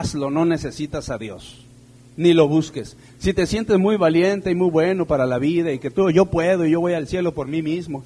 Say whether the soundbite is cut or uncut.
uncut